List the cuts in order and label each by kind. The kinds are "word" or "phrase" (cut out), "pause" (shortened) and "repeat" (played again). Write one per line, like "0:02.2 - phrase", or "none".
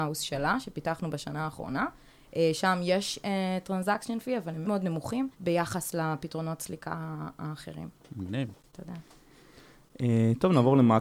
0:04.6 - word
0:05.3 - pause
0:08.6 - pause